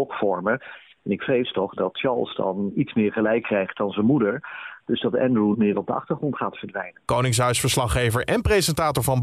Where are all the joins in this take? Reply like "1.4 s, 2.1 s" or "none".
1.8 s, 2.7 s, 5.5 s